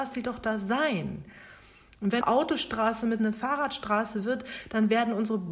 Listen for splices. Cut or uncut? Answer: cut